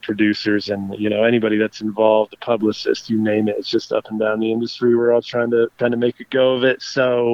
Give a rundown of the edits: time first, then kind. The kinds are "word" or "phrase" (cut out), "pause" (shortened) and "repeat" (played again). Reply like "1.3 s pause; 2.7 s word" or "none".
5.7 s pause